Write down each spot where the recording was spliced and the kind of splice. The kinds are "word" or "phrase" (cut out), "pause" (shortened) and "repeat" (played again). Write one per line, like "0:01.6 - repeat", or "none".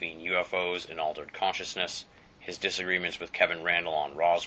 none